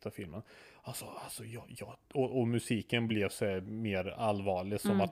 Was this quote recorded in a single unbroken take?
yes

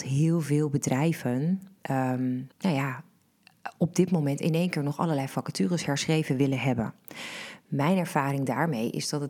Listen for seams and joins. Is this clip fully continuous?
no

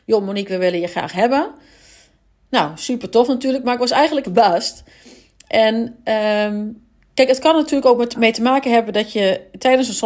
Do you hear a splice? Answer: yes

